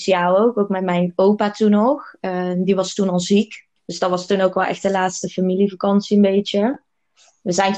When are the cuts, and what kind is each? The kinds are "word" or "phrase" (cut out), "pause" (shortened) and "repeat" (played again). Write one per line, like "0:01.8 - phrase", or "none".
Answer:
0:03.8 - pause